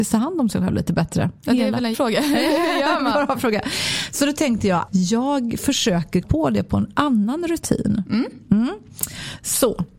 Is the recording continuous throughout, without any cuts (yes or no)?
no